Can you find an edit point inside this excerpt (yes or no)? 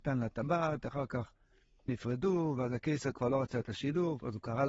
yes